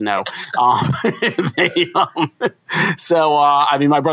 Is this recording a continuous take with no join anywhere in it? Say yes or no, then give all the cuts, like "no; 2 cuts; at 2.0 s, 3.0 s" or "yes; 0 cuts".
yes; 0 cuts